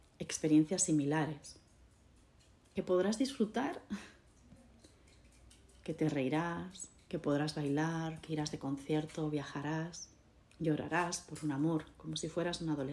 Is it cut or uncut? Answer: uncut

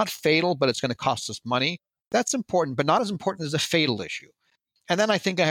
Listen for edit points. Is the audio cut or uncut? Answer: uncut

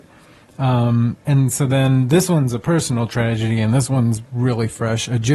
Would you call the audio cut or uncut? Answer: cut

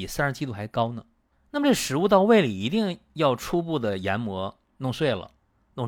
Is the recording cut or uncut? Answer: cut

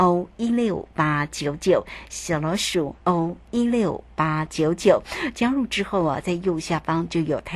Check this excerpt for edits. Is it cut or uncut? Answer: cut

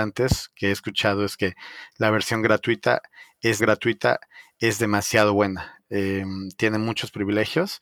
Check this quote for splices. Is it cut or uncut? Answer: cut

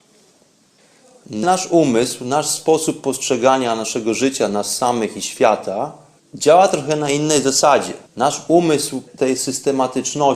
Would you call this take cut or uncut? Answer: cut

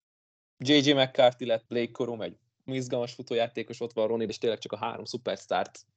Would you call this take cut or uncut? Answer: cut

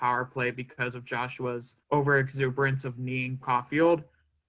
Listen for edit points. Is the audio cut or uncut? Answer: cut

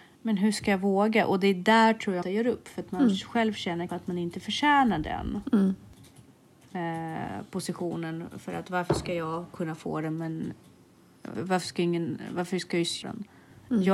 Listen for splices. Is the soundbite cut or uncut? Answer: cut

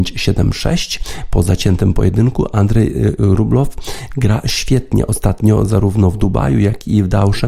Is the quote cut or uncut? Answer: uncut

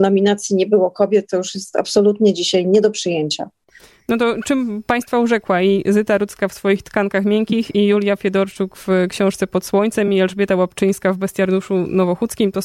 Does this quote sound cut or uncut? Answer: uncut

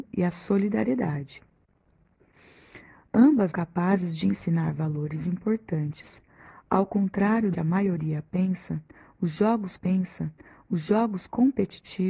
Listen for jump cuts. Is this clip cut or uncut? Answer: cut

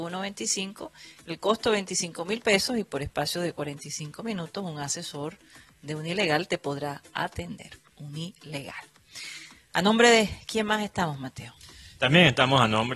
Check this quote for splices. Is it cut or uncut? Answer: uncut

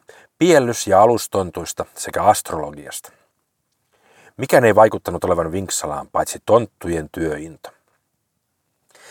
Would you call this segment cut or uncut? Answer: uncut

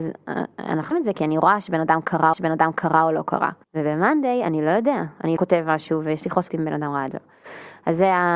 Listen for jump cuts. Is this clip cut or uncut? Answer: cut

